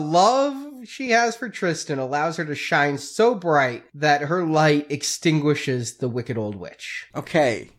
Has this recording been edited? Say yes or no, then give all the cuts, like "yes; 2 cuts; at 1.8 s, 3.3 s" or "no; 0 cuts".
no; 0 cuts